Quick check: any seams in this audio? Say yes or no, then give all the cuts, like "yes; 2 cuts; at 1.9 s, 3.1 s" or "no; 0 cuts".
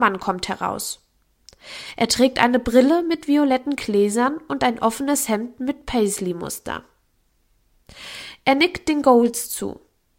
no; 0 cuts